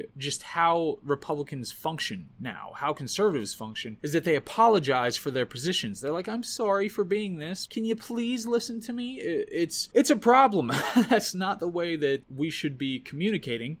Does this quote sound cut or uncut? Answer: cut